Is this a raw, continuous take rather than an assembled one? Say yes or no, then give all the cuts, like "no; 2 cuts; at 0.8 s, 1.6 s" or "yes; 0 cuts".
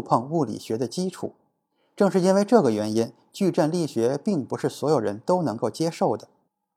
yes; 0 cuts